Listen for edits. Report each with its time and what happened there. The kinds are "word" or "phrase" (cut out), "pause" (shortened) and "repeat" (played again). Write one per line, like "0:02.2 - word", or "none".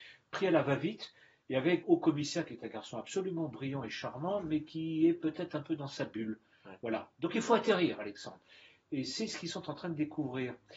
0:01.8 - word